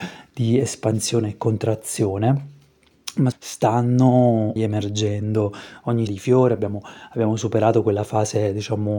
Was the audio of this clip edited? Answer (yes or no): yes